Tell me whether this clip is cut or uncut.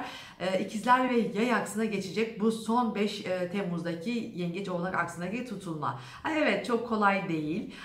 uncut